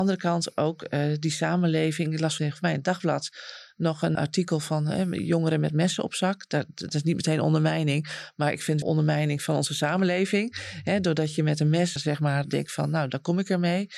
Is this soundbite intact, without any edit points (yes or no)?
no